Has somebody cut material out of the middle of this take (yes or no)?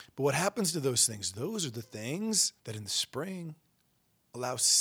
yes